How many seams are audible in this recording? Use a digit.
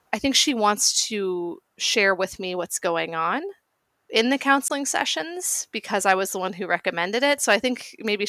0